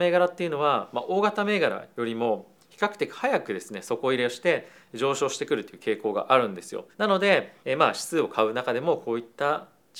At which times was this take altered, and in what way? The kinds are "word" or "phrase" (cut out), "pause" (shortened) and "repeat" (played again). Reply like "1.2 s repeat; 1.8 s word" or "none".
6.9 s pause; 7.6 s pause